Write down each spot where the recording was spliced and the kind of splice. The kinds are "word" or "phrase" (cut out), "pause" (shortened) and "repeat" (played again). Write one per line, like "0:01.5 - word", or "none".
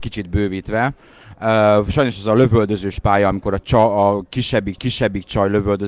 0:04.8 - repeat